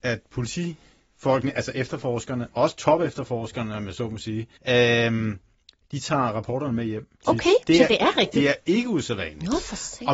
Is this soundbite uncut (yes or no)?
no